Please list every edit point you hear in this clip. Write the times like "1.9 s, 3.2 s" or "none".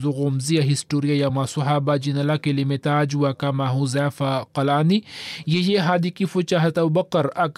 none